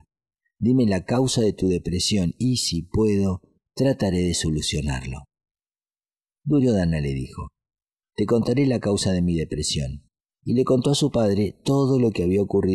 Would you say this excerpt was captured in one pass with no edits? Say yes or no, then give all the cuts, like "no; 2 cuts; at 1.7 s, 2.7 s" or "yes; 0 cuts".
no; 1 cut; at 10.2 s